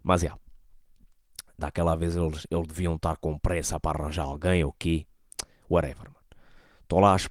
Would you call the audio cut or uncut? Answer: uncut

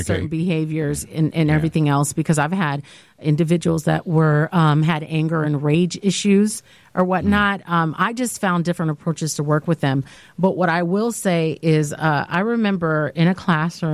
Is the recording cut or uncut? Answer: uncut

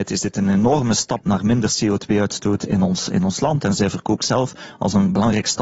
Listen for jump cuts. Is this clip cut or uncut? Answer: cut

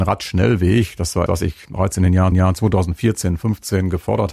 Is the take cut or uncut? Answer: cut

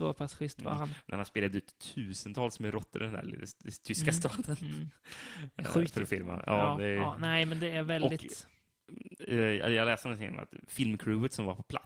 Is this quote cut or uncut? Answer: uncut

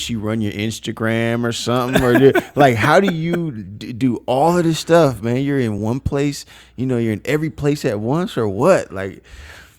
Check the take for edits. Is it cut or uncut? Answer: uncut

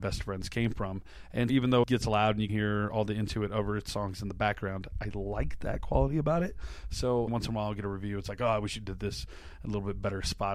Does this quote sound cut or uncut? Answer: cut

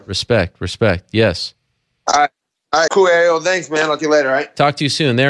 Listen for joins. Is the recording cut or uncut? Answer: cut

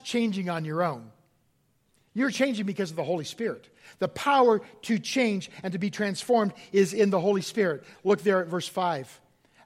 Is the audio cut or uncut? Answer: uncut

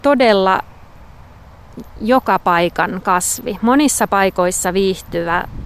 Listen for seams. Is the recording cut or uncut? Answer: uncut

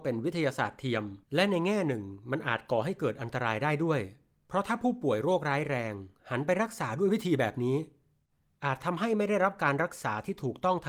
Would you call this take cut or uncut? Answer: cut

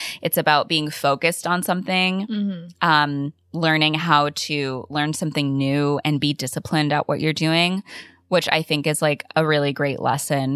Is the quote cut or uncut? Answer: uncut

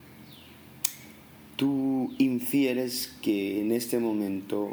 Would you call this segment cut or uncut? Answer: uncut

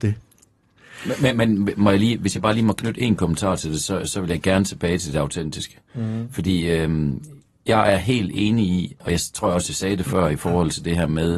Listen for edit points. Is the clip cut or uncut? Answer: uncut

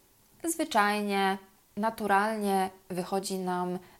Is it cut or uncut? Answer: uncut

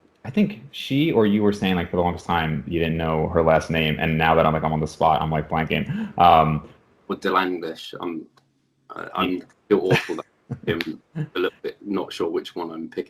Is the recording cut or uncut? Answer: uncut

